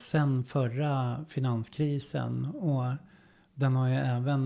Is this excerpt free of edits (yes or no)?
yes